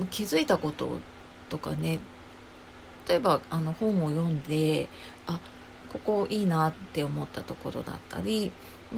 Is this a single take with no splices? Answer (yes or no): no